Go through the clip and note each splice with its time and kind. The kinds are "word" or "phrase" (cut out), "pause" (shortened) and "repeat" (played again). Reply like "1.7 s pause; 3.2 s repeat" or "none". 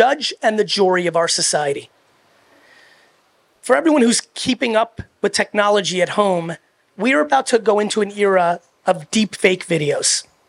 none